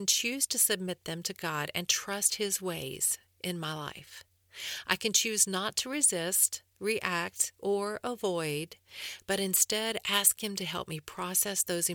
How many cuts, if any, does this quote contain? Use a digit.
0